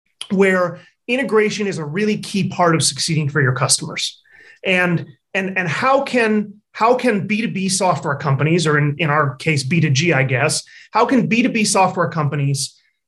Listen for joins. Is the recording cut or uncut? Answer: uncut